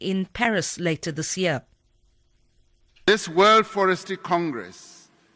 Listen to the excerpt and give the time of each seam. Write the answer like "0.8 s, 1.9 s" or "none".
none

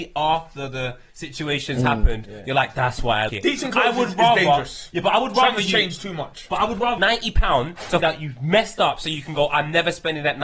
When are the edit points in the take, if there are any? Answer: 3.3 s, 7.0 s, 8.0 s

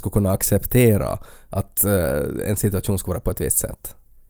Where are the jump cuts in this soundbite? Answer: none

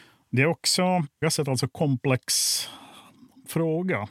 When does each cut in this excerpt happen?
1.2 s

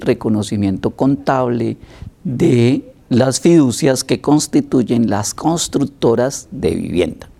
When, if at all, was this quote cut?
none

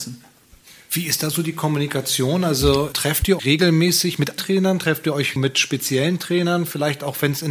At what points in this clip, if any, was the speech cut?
2.9 s, 3.4 s, 4.4 s, 5.4 s

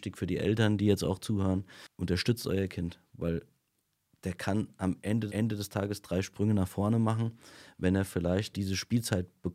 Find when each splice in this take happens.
5.3 s, 8.5 s

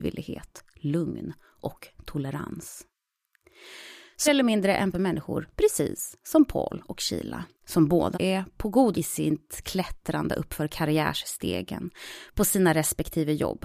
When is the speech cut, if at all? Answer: 4.3 s, 4.9 s, 7.5 s, 8.1 s, 8.9 s

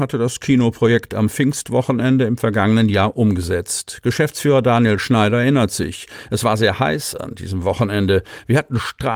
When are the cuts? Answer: none

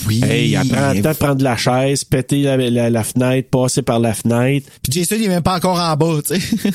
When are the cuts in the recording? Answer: 4.8 s

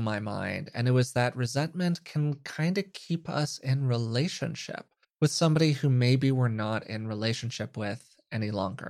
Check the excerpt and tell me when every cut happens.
5.0 s

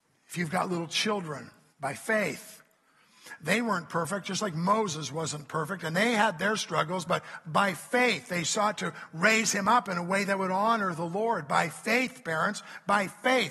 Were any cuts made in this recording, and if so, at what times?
1.7 s

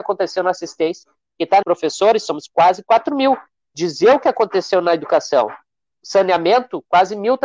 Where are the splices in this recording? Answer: 1.6 s

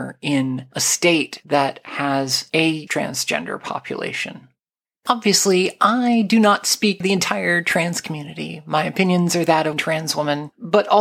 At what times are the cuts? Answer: 2.9 s, 7.0 s, 9.7 s

